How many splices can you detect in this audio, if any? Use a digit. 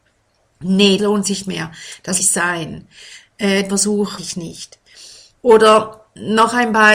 5